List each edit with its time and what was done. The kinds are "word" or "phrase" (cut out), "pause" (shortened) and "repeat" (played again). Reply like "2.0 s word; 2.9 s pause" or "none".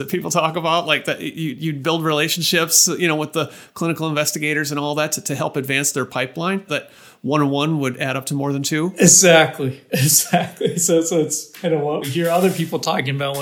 6.7 s word; 12.0 s word